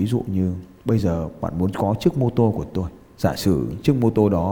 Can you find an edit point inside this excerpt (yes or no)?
no